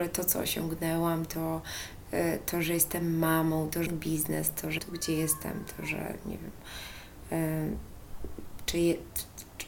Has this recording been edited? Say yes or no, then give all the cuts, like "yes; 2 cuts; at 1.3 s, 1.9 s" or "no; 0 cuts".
yes; 2 cuts; at 3.9 s, 4.8 s